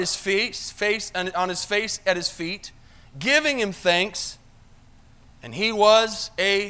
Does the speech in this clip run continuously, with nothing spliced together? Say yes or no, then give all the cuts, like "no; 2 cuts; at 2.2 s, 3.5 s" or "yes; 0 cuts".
yes; 0 cuts